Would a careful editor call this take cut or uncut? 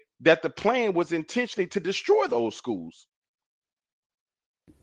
uncut